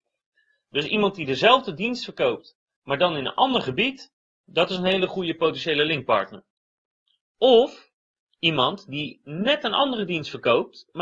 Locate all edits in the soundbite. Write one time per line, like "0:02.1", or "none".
none